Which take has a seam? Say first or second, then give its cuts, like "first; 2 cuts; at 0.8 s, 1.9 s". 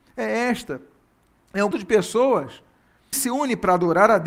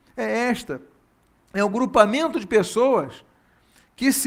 first; 2 cuts; at 1.7 s, 3.1 s